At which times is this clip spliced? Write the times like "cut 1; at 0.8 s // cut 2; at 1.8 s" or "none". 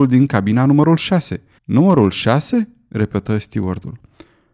cut 1; at 1.6 s